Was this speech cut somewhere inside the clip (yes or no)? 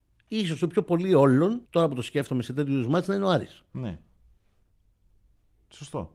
yes